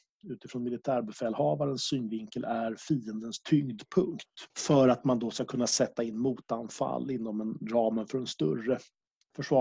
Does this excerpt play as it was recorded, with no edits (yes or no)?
no